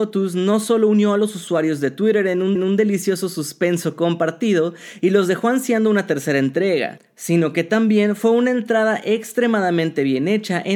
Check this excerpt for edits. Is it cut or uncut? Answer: cut